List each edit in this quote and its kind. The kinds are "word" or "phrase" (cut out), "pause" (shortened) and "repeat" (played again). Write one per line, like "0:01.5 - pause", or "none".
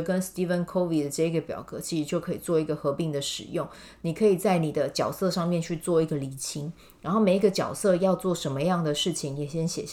none